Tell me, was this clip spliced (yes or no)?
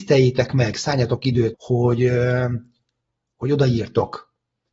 yes